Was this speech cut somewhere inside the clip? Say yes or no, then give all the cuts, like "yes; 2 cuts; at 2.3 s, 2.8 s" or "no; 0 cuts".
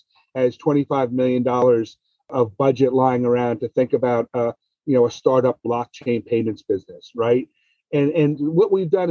no; 0 cuts